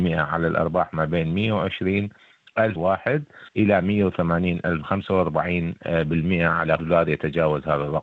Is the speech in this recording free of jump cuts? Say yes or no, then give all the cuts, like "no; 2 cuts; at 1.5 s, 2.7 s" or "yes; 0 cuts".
no; 4 cuts; at 2.8 s, 3.5 s, 4.8 s, 6.8 s